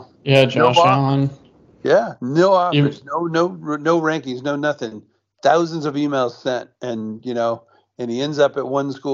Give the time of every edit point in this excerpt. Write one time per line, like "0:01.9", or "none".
none